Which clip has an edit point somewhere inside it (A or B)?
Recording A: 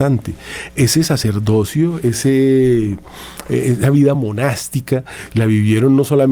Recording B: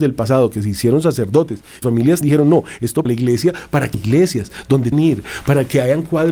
B